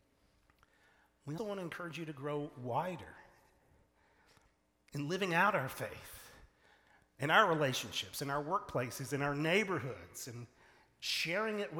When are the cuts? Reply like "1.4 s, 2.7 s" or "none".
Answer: 1.4 s